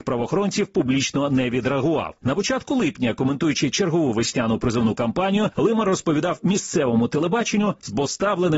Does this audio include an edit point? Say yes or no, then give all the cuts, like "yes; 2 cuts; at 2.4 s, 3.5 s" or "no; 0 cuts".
no; 0 cuts